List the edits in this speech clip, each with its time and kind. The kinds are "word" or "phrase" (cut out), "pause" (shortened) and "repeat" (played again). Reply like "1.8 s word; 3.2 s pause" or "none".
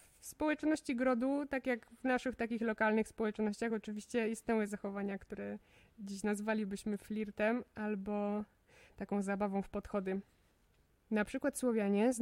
none